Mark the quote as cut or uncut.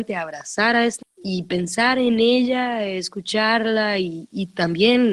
cut